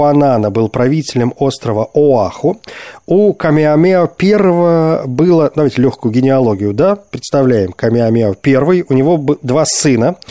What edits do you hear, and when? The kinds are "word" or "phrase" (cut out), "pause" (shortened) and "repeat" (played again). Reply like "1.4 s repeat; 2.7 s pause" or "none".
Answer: none